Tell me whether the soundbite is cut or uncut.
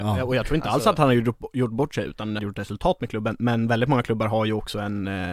cut